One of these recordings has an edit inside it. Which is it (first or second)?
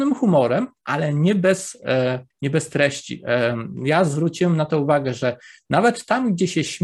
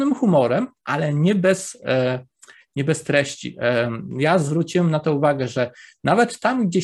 first